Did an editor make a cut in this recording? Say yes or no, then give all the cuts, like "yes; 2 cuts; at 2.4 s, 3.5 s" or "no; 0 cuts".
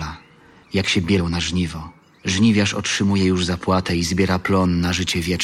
no; 0 cuts